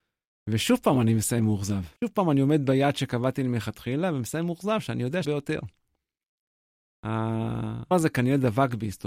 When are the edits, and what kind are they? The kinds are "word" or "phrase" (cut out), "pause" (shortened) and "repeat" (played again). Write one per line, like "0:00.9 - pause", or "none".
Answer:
0:02.0 - pause
0:05.2 - phrase
0:07.9 - word